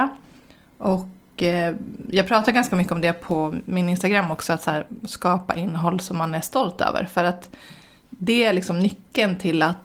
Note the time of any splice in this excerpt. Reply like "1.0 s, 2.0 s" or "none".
none